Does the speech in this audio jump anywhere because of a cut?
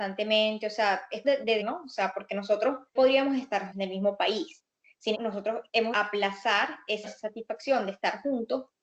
yes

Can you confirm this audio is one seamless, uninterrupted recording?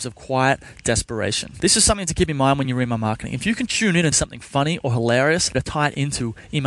no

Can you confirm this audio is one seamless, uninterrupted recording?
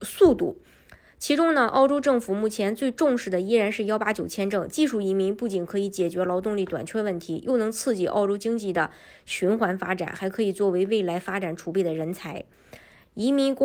yes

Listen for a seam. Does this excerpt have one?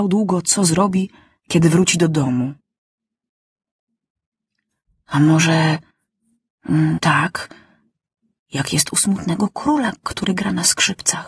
yes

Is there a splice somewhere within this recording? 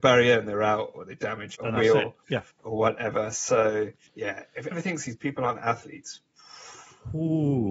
yes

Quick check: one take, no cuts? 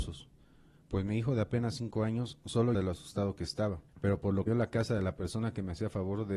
no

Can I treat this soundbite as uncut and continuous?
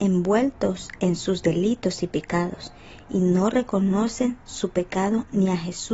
yes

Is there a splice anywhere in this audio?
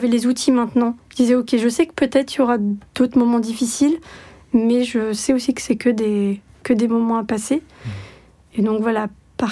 no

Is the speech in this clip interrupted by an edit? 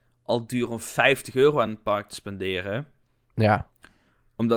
no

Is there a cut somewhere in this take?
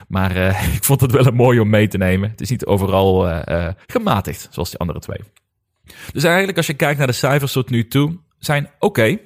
yes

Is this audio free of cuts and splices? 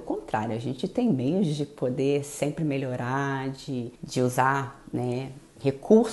no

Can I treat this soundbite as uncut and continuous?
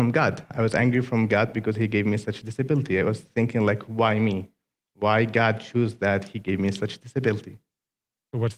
yes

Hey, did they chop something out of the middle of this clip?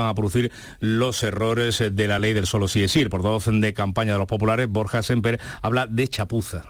no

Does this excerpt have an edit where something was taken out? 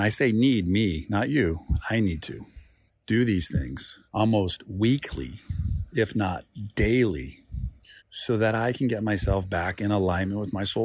yes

